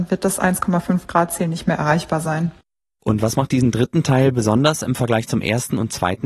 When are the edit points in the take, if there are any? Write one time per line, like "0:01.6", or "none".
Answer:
none